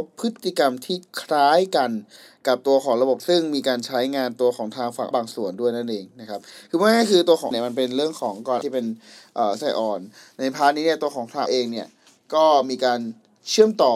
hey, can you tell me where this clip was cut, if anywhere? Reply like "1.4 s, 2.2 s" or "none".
3.2 s, 5.1 s, 7.5 s, 8.6 s, 9.6 s, 11.5 s